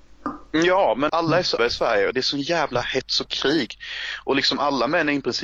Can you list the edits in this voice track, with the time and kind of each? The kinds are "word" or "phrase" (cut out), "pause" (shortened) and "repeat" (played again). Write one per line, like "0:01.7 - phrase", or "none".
0:01.1 - word
0:01.6 - word